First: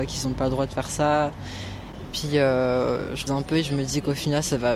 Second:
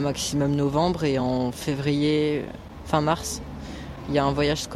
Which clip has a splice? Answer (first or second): first